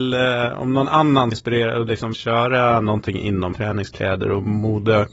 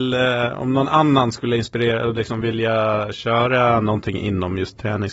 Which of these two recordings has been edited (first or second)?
first